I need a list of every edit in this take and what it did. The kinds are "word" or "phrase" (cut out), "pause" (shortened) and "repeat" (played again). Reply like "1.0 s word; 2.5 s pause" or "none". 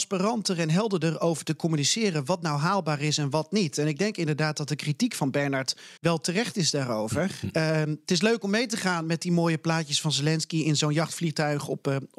6.0 s pause